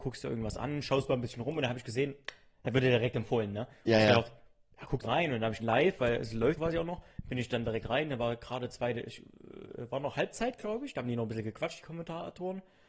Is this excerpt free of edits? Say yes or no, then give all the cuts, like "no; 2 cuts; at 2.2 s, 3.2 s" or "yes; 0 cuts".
no; 3 cuts; at 5.0 s, 5.6 s, 6.6 s